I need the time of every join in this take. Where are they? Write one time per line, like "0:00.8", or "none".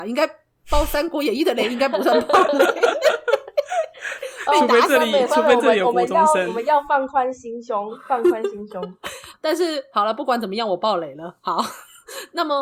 0:09.3